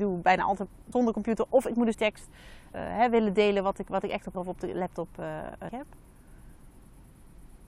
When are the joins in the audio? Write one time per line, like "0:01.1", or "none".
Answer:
0:00.9
0:01.9
0:02.7
0:04.3
0:05.7